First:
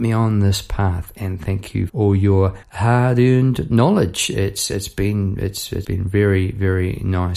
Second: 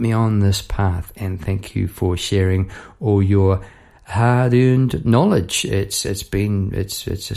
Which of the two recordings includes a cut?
first; 3 cuts; at 1.9 s, 2.6 s, 5.8 s

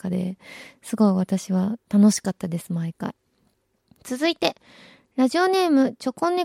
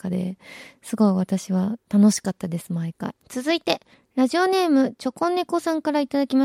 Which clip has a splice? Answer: second; 2 cuts; at 3.2 s, 3.9 s

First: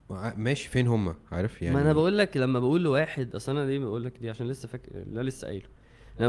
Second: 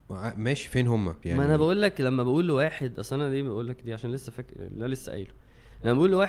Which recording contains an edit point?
second; 1 cut; at 1.2 s

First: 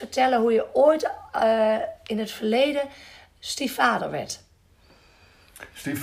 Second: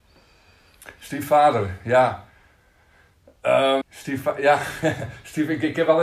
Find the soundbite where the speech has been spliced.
second; 1 cut; at 3.8 s

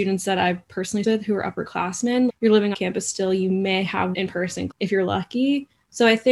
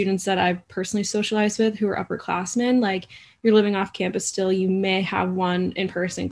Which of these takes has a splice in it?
first; 5 cuts; at 1.0 s, 2.3 s, 2.7 s, 4.1 s, 4.7 s

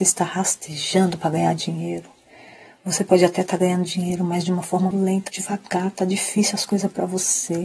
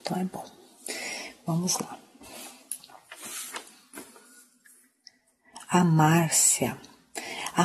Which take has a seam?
first; 2 cuts; at 4.9 s, 5.3 s

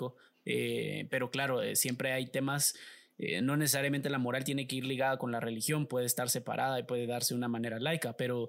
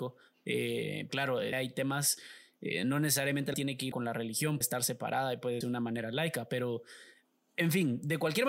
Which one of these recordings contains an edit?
second; 6 cuts; at 1.1 s, 1.5 s, 3.5 s, 3.9 s, 4.6 s, 5.6 s

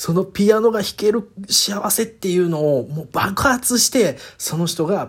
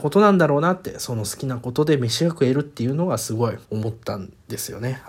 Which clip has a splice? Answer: second; 1 cut; at 3.6 s

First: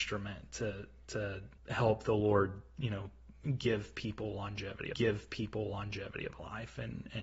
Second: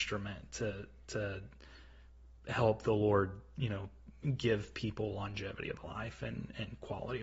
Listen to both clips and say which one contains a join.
first; 2 cuts; at 1.6 s, 4.9 s

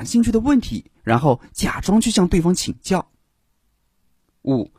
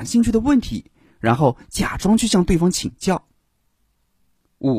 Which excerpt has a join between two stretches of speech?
first; 1 cut; at 1.0 s

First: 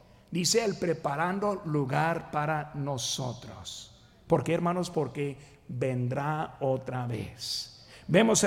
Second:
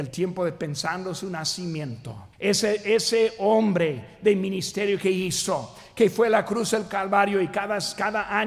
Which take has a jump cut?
second; 1 cut; at 2.3 s

